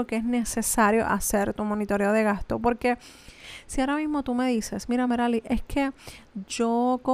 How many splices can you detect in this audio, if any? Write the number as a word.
zero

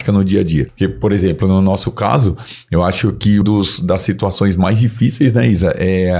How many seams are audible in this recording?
one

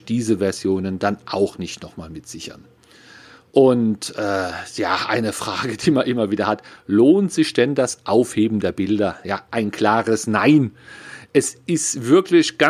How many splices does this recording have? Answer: zero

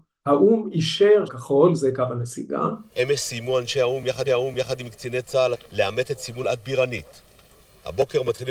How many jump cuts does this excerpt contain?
four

